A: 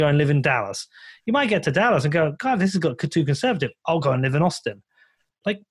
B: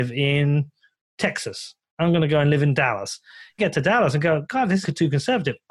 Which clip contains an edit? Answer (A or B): B